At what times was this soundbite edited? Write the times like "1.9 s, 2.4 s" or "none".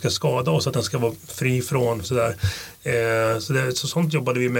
2.0 s